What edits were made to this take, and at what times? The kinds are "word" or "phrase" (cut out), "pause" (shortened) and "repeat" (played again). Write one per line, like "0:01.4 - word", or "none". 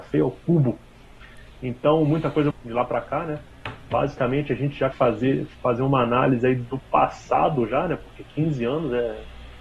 0:02.5 - word
0:04.9 - word
0:05.5 - pause